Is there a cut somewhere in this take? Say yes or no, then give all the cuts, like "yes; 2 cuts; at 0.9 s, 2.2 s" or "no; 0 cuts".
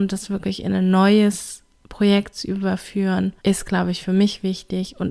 yes; 1 cut; at 3.4 s